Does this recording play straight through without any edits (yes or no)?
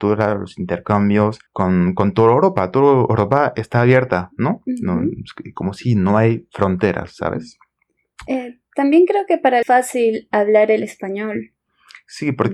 no